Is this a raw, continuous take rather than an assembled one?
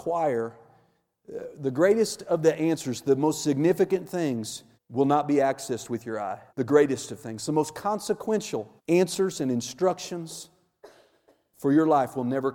no; 3 cuts; at 4.7 s, 6.5 s, 8.8 s

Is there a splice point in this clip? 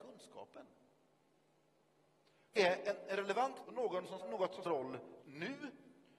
yes; 5 cuts; at 2.6 s, 3.6 s, 4.2 s, 4.6 s, 5.2 s

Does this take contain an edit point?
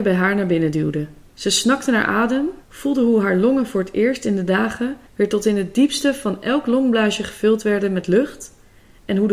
yes; 3 cuts; at 1.2 s, 2.6 s, 5.1 s

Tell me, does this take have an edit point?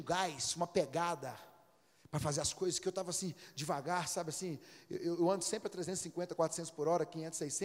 no; 0 cuts

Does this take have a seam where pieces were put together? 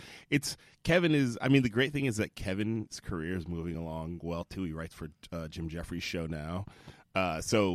no; 0 cuts

